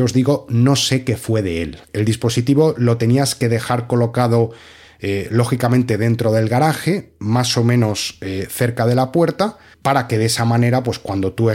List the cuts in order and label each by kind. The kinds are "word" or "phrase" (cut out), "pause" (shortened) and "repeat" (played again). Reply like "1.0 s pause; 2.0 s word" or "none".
none